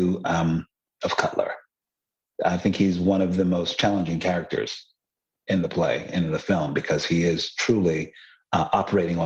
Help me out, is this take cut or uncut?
cut